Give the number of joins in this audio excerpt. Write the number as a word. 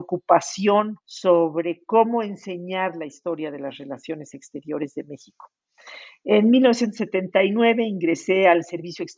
one